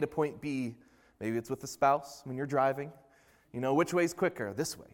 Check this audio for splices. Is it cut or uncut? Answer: uncut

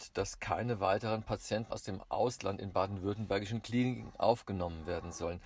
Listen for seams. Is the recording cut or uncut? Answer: cut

